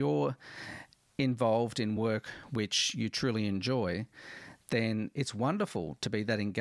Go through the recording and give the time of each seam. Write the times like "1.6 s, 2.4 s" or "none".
none